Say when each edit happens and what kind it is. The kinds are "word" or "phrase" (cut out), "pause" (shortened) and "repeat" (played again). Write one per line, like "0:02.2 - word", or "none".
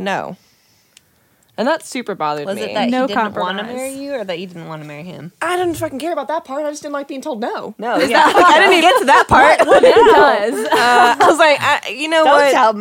0:08.8 - word